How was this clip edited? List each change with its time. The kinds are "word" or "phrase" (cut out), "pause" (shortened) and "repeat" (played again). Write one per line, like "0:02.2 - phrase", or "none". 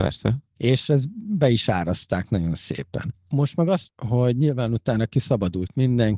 0:03.9 - word